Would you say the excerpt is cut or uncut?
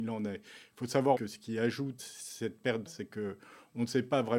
cut